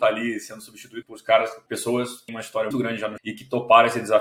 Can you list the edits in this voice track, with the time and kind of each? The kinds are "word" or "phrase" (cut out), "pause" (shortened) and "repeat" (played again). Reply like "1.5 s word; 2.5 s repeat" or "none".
1.0 s word; 1.7 s word; 2.3 s word; 2.7 s word; 3.2 s word